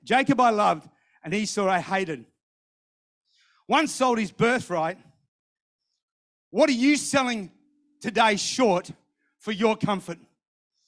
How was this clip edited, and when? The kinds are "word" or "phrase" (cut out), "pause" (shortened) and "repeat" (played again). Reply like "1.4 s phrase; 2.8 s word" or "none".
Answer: none